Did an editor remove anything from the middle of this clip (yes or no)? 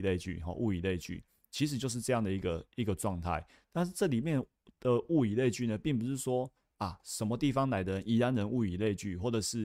no